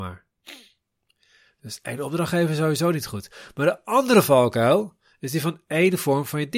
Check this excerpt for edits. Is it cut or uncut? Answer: uncut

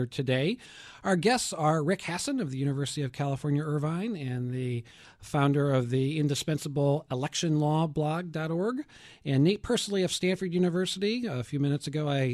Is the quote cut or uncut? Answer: uncut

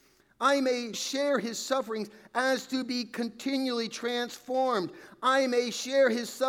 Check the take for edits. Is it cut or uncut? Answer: cut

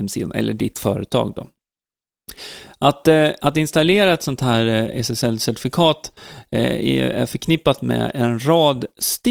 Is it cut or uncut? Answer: uncut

